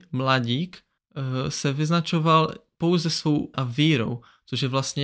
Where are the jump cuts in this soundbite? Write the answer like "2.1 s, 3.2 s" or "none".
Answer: 3.5 s